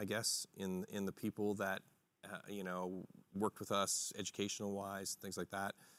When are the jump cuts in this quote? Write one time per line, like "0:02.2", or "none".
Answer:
none